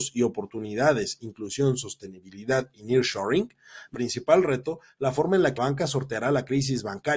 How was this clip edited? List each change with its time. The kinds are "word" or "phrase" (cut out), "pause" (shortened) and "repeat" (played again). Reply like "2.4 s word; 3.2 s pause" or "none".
3.9 s phrase; 5.6 s word